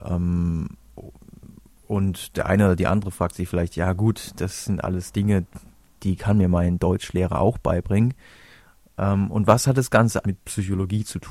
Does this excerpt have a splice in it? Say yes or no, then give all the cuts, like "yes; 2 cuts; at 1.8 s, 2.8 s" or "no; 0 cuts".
yes; 1 cut; at 10.2 s